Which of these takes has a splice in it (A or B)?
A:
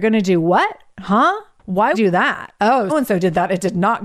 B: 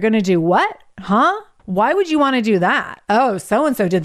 A